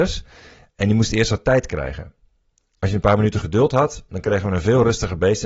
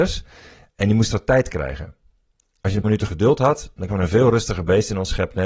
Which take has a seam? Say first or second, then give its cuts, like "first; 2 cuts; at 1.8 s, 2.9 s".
second; 3 cuts; at 1.1 s, 2.8 s, 3.9 s